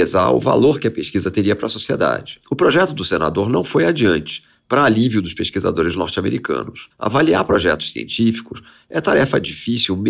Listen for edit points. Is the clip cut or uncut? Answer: uncut